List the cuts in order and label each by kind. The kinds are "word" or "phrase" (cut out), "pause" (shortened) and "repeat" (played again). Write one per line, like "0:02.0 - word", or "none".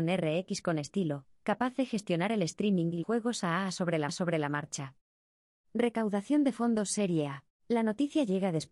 0:03.0 - word
0:04.1 - repeat
0:07.5 - pause